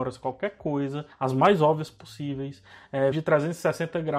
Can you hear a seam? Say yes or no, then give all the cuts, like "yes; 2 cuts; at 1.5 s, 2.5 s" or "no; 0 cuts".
yes; 2 cuts; at 1.1 s, 3.1 s